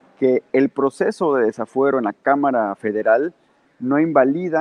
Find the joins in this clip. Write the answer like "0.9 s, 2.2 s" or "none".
none

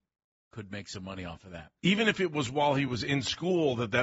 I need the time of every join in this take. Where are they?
none

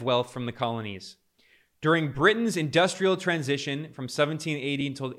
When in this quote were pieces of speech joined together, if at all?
none

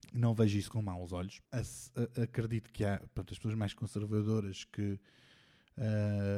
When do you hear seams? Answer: 1.4 s

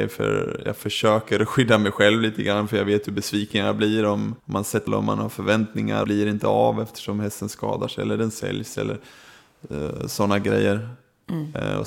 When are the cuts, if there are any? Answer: 4.4 s, 4.9 s, 6.0 s

